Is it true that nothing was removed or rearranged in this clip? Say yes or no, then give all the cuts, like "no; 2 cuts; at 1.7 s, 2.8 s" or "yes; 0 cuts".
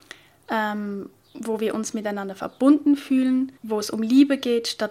no; 1 cut; at 3.6 s